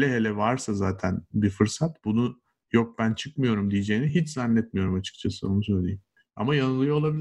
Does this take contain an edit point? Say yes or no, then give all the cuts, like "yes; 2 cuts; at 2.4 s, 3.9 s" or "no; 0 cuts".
no; 0 cuts